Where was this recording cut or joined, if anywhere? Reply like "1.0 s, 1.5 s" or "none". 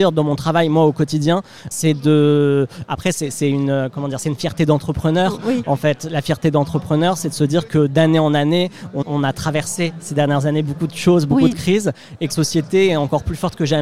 1.7 s, 3.3 s, 7.7 s, 9.0 s, 12.3 s